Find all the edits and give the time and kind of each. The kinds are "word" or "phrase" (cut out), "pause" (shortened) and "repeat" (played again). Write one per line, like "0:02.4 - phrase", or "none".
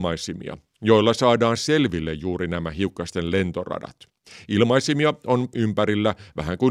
0:05.5 - word